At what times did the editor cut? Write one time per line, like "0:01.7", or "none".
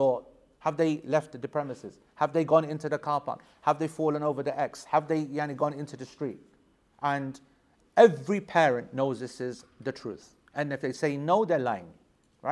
none